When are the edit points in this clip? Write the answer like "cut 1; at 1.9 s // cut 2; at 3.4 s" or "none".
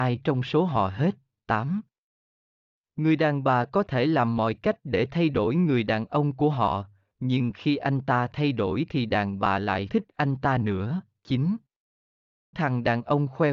cut 1; at 9.9 s // cut 2; at 12.5 s